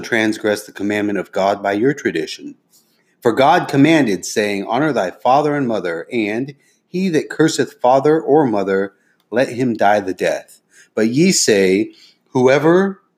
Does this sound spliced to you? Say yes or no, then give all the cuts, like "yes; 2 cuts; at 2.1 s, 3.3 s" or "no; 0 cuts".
no; 0 cuts